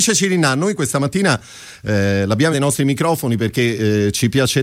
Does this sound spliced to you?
yes; 1 cut; at 2.5 s

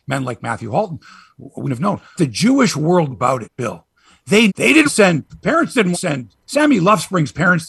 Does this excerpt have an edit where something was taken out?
yes; 7 cuts; at 1.6 s, 2.2 s, 3.1 s, 3.4 s, 4.5 s, 4.8 s, 5.9 s

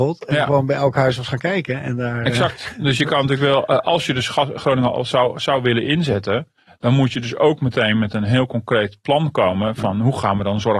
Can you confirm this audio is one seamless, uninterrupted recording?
yes; 0 cuts

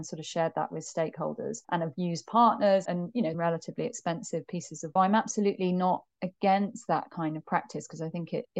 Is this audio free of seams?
no; 4 cuts; at 1.6 s, 2.8 s, 3.3 s, 5.0 s

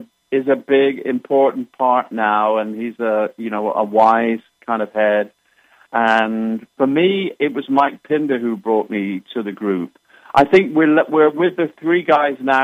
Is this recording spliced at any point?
no; 0 cuts

